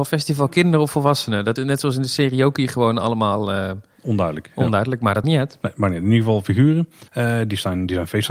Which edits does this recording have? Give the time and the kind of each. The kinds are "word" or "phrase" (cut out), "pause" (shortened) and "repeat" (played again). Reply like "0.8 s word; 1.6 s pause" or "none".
1.6 s word; 5.2 s word; 7.1 s pause